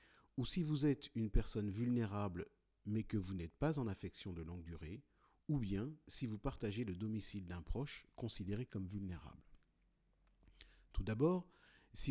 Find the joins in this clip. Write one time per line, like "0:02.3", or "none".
none